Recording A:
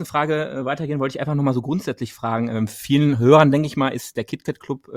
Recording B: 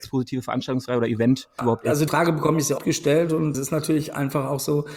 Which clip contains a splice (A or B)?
B